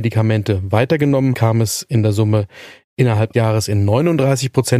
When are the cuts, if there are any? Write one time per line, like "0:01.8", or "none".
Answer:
0:01.3
0:03.3